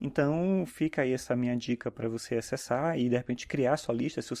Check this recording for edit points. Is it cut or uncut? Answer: uncut